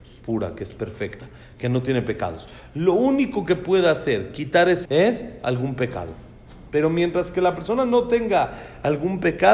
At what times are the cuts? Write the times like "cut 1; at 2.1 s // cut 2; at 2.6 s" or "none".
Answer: cut 1; at 4.8 s